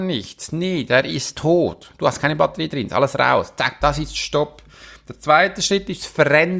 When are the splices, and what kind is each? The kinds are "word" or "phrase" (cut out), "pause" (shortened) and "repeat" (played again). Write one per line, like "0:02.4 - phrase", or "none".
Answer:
0:03.8 - word

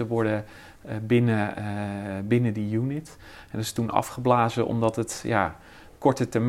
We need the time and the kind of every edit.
none

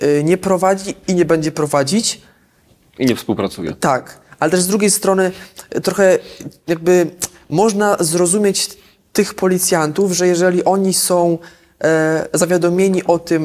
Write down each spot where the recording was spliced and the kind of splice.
none

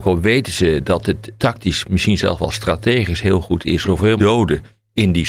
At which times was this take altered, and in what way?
0:01.4 - word
0:03.8 - word
0:04.2 - phrase

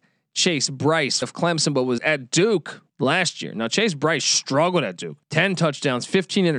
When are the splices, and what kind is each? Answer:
0:01.2 - word
0:02.0 - word
0:02.9 - pause
0:05.2 - pause

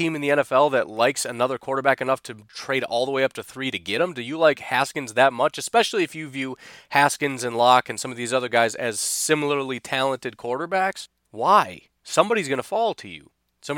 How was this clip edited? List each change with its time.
0:11.2 - pause

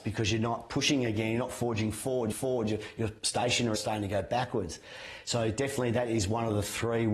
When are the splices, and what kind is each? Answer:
0:02.3 - repeat
0:03.7 - word

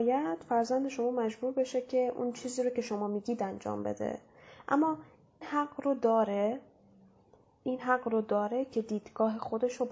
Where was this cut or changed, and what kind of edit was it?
0:05.4 - word

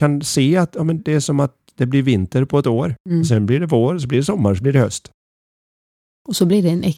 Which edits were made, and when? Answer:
0:01.0 - word
0:03.0 - pause

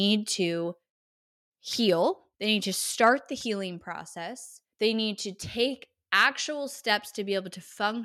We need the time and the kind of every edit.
0:02.3 - pause
0:04.7 - pause

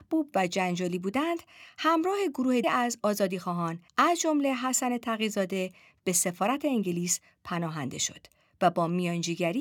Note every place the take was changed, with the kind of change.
0:02.6 - word
0:03.9 - pause

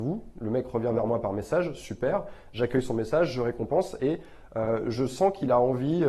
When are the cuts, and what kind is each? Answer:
none

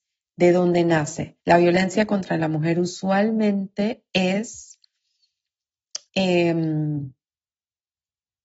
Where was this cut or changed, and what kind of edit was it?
0:01.4 - pause
0:06.1 - pause

